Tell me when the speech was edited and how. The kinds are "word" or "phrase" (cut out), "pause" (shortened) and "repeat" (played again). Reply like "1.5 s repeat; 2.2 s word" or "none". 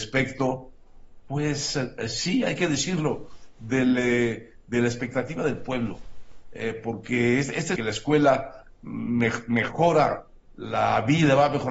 7.8 s phrase